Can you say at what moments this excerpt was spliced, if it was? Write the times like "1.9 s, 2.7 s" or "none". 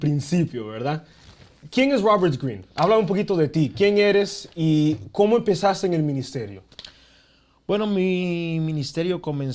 none